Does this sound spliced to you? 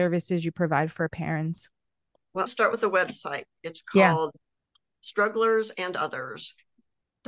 yes; 1 cut; at 2.5 s

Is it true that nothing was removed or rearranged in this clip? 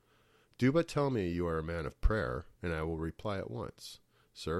no; 1 cut; at 2.5 s

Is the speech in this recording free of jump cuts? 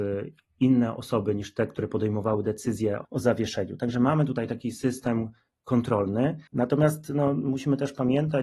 no; 2 cuts; at 3.0 s, 6.5 s

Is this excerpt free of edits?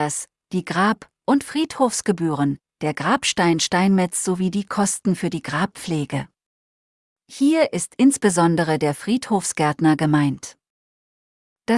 yes; 0 cuts

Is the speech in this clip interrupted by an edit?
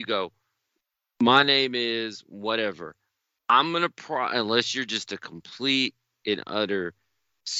no; 0 cuts

